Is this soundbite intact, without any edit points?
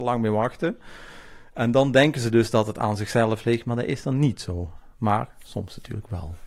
yes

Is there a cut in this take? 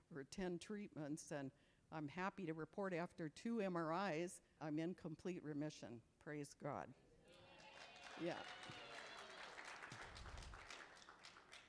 yes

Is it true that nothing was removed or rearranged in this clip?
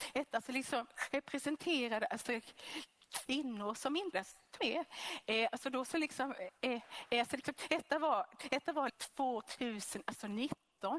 no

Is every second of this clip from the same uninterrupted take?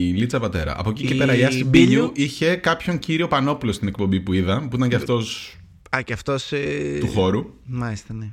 yes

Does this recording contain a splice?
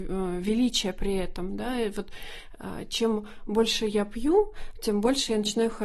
no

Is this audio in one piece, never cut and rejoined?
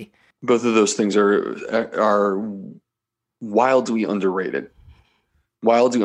yes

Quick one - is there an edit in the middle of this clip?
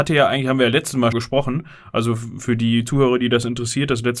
yes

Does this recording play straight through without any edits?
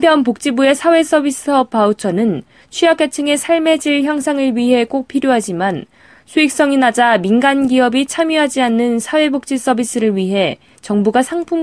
yes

